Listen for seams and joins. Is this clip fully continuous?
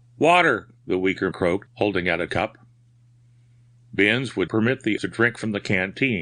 no; 5 cuts; at 1.3 s, 1.7 s, 2.3 s, 4.5 s, 5.0 s

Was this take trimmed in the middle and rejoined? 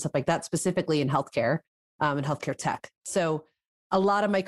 no; 0 cuts

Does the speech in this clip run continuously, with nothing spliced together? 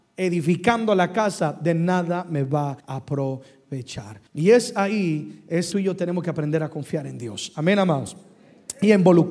no; 3 cuts; at 2.8 s, 4.3 s, 5.7 s

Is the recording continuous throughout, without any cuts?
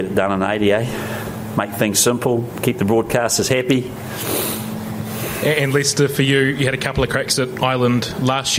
yes; 0 cuts

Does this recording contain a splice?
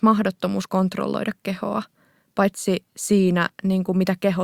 no; 0 cuts

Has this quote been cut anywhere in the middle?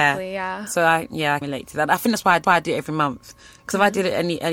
yes; 2 cuts; at 1.4 s, 2.4 s

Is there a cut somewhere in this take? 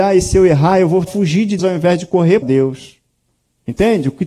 yes; 3 cuts; at 1.1 s, 1.6 s, 2.4 s

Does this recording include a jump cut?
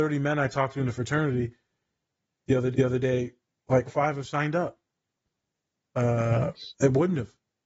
yes; 2 cuts; at 2.7 s, 3.9 s

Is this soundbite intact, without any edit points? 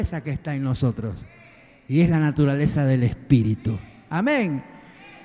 yes; 0 cuts

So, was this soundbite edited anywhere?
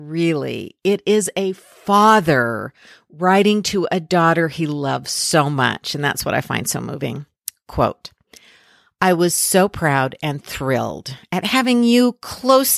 no; 0 cuts

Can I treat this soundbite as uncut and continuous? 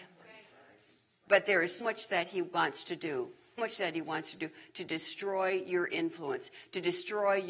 no; 2 cuts; at 1.8 s, 3.6 s

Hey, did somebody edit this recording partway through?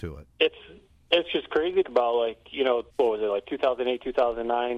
yes; 2 cuts; at 1.8 s, 2.9 s

